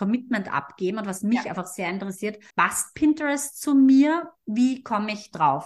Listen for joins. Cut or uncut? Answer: cut